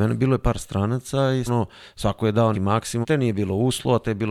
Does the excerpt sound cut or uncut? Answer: cut